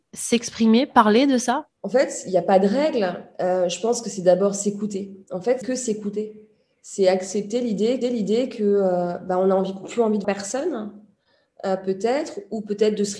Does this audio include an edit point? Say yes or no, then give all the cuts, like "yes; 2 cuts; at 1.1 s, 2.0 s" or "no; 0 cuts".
yes; 4 cuts; at 1.8 s, 5.6 s, 8.0 s, 10.2 s